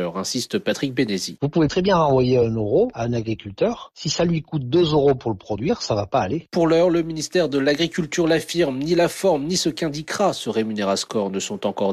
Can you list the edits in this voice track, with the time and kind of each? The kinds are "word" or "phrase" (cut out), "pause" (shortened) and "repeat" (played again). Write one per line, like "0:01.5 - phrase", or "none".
none